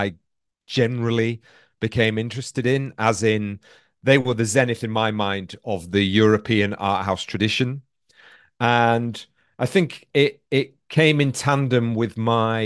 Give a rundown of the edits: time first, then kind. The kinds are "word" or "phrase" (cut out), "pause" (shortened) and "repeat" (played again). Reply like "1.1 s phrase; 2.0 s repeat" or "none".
none